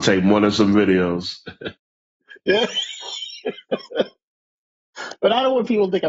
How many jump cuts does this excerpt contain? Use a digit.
0